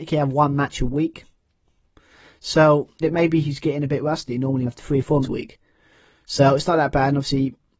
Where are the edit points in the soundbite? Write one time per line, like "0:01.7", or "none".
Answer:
0:03.0
0:04.7
0:05.2